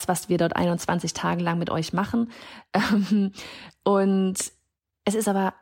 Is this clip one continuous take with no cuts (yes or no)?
yes